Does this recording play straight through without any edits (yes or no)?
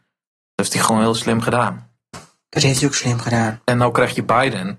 yes